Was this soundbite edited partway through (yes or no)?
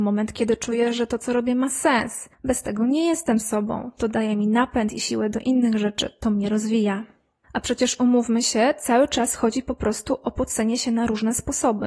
no